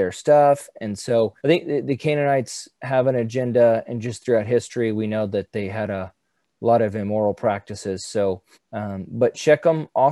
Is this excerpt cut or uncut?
cut